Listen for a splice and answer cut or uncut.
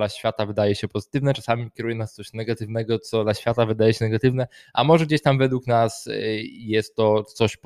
uncut